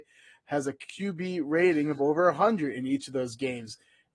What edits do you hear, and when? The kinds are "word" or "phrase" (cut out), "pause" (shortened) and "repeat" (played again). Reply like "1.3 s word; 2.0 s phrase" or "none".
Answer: none